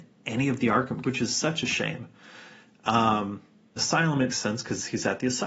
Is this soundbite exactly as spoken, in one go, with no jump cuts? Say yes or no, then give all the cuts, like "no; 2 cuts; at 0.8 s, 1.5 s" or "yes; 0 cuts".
no; 3 cuts; at 1.0 s, 3.8 s, 4.3 s